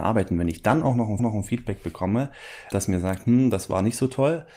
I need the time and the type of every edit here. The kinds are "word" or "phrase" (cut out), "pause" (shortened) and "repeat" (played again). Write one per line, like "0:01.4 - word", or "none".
0:01.2 - repeat
0:02.7 - word